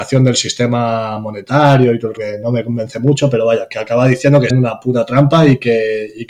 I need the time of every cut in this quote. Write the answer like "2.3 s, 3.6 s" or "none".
2.2 s, 4.5 s